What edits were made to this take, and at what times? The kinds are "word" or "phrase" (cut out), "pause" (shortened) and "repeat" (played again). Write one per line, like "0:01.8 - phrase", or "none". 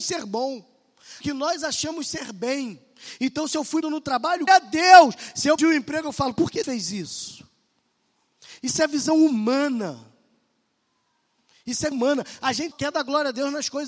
0:01.2 - word
0:03.8 - word
0:04.5 - word
0:05.6 - word
0:06.6 - word
0:11.9 - word
0:12.7 - word